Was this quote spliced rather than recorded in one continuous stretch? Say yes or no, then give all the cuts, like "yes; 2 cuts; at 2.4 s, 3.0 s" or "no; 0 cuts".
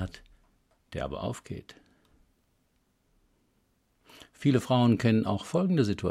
no; 0 cuts